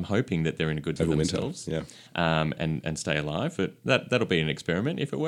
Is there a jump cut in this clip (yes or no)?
yes